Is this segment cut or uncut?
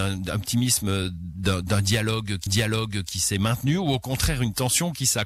cut